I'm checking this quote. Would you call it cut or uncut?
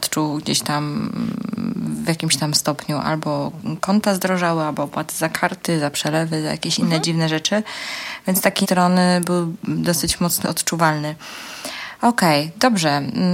cut